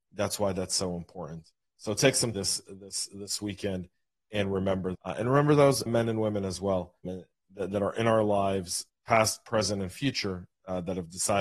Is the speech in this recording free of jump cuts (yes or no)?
no